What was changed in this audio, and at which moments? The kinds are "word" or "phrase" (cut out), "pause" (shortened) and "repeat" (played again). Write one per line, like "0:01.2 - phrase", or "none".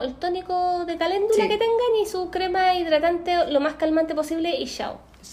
none